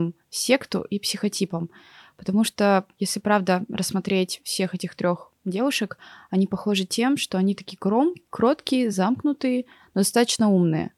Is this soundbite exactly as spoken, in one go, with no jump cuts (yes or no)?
yes